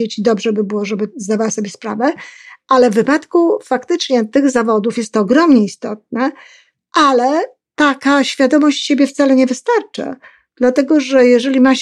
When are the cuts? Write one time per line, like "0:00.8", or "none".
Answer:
none

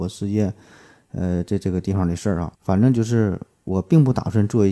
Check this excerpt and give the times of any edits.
0:02.5

